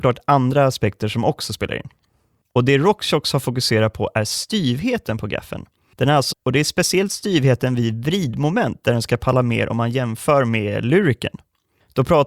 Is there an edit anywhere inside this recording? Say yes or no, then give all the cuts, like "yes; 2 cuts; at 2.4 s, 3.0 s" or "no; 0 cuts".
yes; 1 cut; at 6.3 s